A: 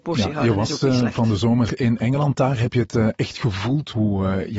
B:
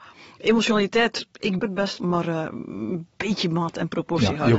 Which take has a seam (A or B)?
B